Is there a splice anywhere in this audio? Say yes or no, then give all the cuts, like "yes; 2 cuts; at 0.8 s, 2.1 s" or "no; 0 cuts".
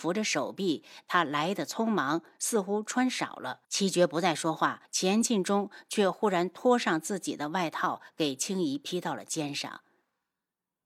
yes; 2 cuts; at 3.6 s, 4.8 s